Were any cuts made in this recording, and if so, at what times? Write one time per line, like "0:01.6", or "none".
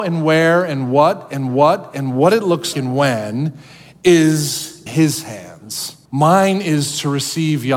0:01.5
0:02.7
0:04.9
0:06.0